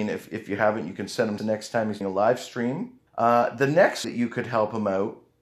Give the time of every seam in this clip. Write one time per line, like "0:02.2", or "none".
0:01.4
0:02.0
0:03.1
0:04.0